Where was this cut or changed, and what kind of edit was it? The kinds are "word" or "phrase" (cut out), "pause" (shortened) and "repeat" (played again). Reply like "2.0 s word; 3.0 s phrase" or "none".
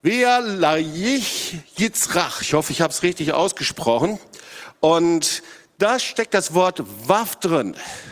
none